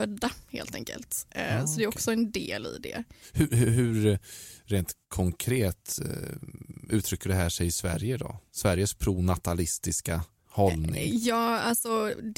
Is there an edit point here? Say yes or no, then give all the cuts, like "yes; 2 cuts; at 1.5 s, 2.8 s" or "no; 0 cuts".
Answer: yes; 2 cuts; at 5.0 s, 10.4 s